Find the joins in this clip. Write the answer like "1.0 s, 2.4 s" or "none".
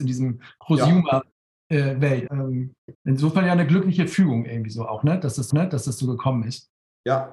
2.3 s, 2.9 s, 5.5 s